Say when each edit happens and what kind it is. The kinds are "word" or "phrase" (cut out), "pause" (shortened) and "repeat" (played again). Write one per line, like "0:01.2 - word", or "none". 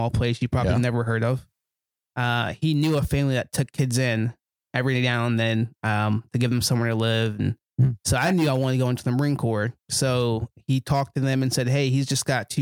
0:09.8 - pause